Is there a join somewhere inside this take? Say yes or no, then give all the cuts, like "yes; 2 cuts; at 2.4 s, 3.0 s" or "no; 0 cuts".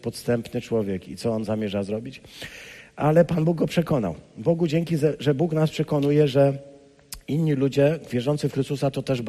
no; 0 cuts